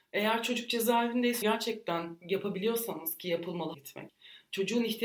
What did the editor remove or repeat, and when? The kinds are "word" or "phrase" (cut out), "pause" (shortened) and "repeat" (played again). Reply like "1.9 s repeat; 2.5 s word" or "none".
1.4 s word; 3.7 s phrase